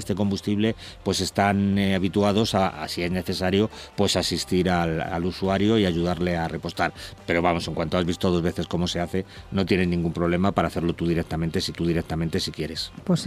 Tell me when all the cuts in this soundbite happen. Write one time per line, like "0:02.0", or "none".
0:11.7